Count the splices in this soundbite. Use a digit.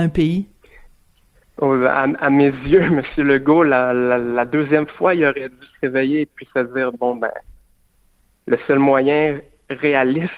0